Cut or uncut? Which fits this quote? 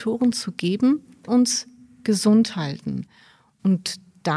cut